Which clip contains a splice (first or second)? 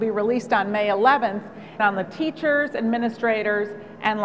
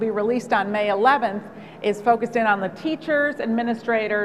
first